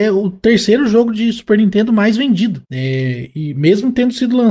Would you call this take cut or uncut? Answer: uncut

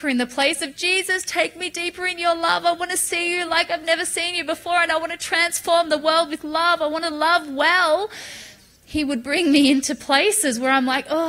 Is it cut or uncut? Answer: uncut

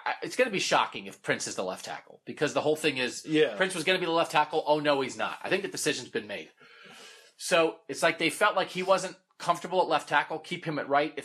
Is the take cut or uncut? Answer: uncut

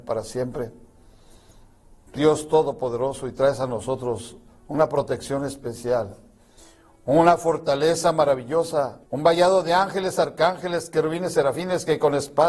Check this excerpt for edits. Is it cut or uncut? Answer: cut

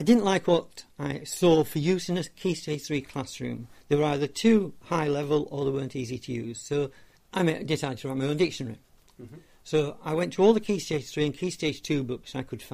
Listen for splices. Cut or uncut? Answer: cut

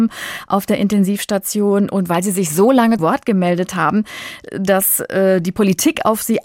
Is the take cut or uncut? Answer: cut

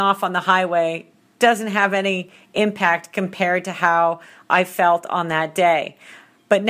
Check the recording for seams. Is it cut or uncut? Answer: uncut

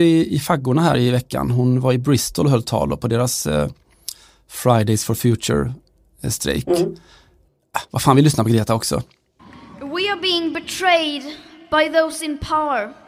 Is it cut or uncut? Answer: uncut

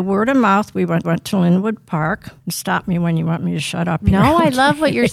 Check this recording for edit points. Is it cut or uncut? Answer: cut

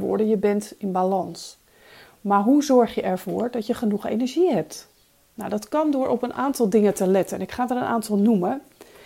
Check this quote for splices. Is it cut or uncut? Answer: uncut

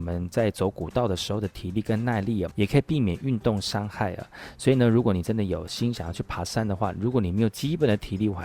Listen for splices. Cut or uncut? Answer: cut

